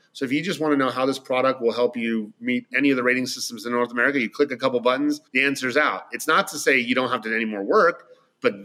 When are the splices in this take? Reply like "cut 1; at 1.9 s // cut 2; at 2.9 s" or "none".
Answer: cut 1; at 5.3 s